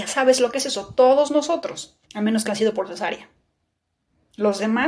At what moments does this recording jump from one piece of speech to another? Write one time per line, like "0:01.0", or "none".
0:02.0
0:02.5